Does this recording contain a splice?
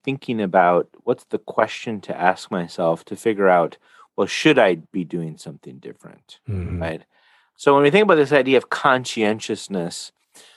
no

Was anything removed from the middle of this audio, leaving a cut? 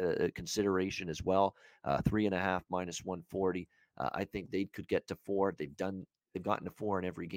no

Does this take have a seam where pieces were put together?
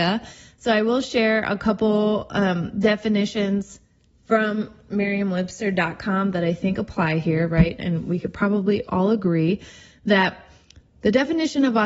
no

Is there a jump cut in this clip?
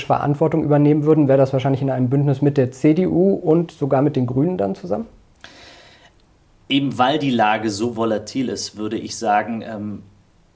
no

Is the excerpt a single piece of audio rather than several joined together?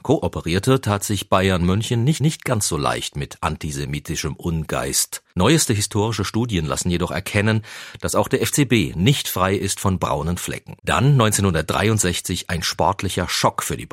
no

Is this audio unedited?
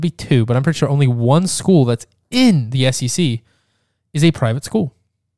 yes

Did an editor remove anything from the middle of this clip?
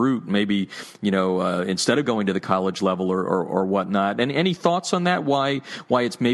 no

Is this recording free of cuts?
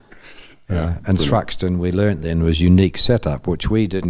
yes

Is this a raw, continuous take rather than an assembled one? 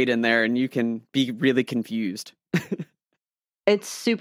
yes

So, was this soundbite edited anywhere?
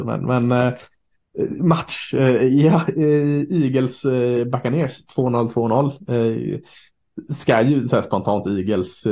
no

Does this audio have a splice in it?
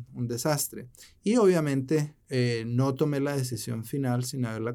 no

